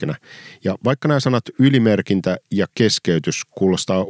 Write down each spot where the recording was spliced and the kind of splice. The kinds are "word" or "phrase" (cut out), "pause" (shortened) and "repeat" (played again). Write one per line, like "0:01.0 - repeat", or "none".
none